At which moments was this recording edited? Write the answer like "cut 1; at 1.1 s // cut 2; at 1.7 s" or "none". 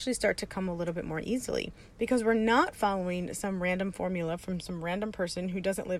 none